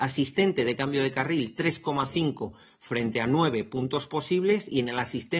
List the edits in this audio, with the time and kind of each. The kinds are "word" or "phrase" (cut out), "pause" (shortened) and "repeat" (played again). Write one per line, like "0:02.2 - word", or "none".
none

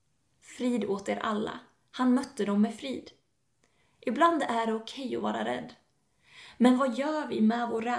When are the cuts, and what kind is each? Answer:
none

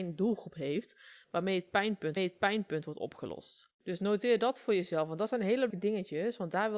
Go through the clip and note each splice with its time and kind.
0:02.2 - repeat
0:03.7 - pause
0:05.7 - word

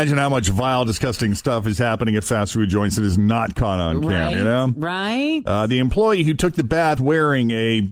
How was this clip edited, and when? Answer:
0:04.3 - word
0:07.0 - word

